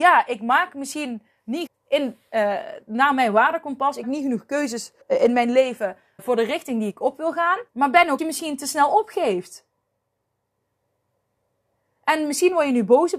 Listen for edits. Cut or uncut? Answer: cut